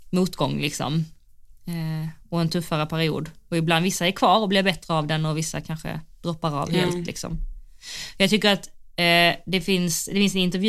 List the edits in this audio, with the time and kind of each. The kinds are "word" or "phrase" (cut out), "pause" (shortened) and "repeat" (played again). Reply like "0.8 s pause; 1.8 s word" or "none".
none